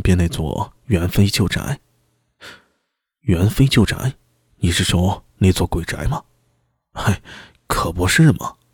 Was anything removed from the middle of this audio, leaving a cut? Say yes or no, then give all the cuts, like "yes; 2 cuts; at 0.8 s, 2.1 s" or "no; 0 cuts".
no; 0 cuts